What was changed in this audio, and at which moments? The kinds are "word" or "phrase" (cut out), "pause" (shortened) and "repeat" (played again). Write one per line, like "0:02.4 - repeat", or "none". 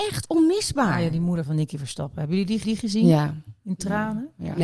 0:02.6 - repeat